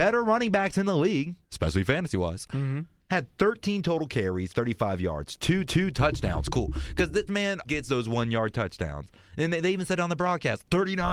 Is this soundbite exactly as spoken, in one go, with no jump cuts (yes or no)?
no